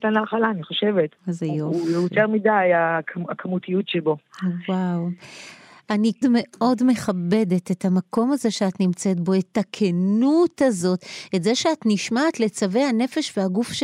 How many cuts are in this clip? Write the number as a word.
two